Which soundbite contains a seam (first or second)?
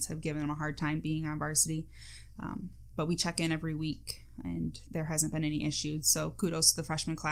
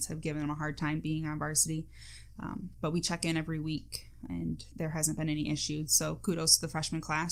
second